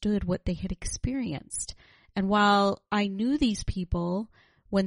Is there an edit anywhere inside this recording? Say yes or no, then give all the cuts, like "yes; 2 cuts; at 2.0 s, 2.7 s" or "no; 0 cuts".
no; 0 cuts